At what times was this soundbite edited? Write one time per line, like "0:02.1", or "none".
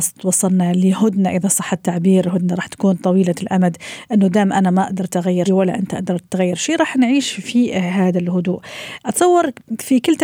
0:05.5